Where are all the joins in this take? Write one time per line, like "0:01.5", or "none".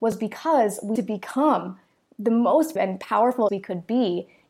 0:01.0
0:02.8
0:03.5

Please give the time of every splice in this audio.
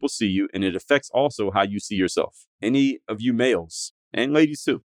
0:02.5

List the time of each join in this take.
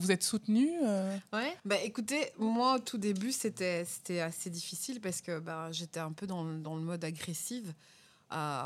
0:01.6

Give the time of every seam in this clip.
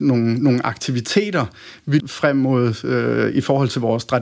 0:02.0

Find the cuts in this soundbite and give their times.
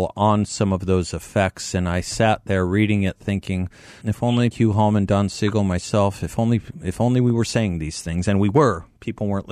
0:04.0
0:04.5

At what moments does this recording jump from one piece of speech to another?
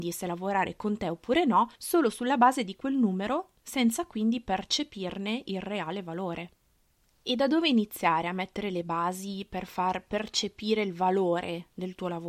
0:01.8
0:03.6
0:06.9

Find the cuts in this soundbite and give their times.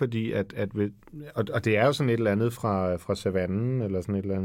none

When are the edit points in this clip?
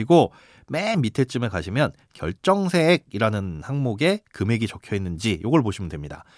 none

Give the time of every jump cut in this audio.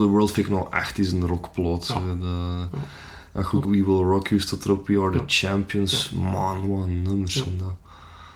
0:03.6

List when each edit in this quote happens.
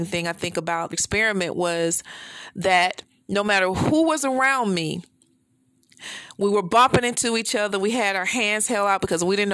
0:00.9

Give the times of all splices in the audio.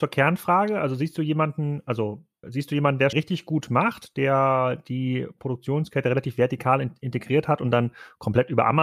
0:02.4
0:03.1

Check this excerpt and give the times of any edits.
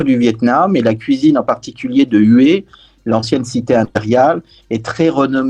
none

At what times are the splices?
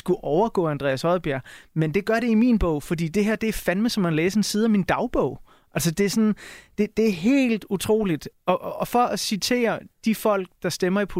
none

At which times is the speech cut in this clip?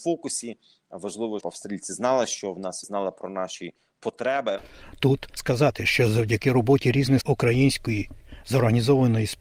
0:01.4
0:02.8
0:05.4
0:07.2

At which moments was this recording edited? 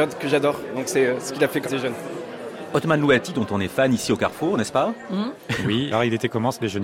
0:01.6
0:05.9

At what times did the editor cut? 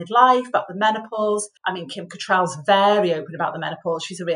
0:01.6

